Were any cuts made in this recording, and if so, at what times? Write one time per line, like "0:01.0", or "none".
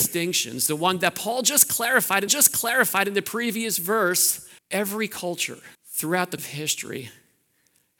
0:02.3
0:04.6
0:05.7
0:06.4